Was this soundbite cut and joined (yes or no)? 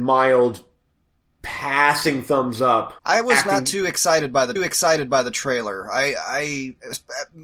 yes